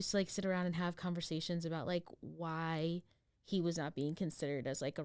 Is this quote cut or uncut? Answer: uncut